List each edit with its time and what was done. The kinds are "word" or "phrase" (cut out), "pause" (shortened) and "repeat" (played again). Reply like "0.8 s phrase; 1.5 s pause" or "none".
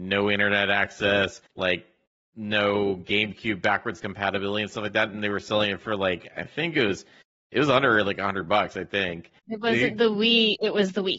1.5 s pause; 9.4 s pause

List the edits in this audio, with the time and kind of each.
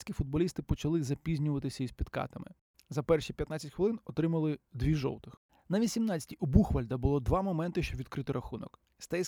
none

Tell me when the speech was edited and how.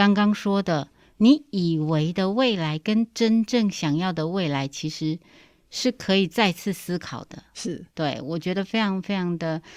7.9 s pause

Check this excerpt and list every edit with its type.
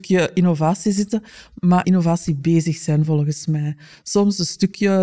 1.8 s phrase

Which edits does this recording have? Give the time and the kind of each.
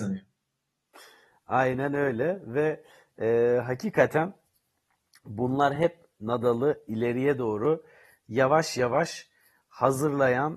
none

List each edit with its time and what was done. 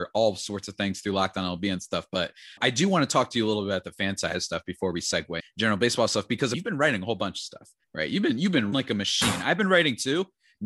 2.6 s word; 5.4 s word; 6.5 s word; 7.8 s pause; 8.7 s word

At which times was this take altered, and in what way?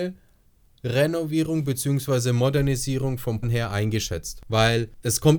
3.4 s word

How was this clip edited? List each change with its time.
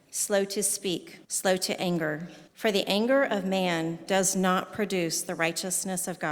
1.2 s pause; 2.5 s pause

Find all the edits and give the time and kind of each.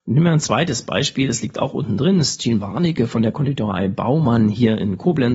none

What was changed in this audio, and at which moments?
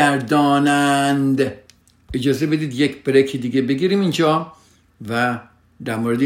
none

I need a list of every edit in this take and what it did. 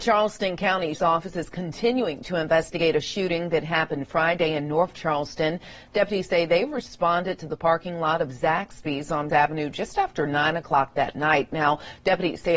0.9 s word; 9.3 s word

